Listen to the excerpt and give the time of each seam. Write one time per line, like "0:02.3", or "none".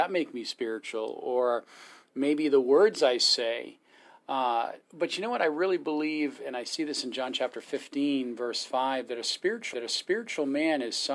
0:04.8
0:09.7